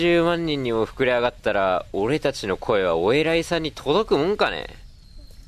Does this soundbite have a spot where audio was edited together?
no; 0 cuts

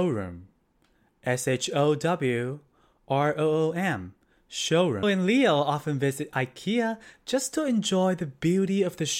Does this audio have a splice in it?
yes; 1 cut; at 5.0 s

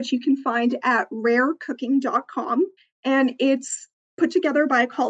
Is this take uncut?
no; 1 cut; at 2.8 s

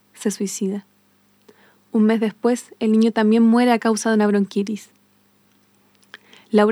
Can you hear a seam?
no; 0 cuts

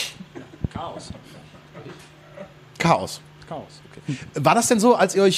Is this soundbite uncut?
yes; 0 cuts

